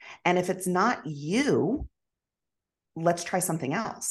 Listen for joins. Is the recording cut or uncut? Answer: cut